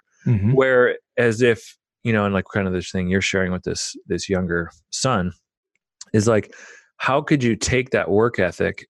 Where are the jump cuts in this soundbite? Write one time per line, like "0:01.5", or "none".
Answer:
none